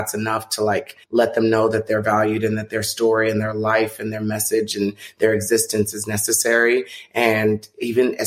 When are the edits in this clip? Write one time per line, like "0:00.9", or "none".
0:01.0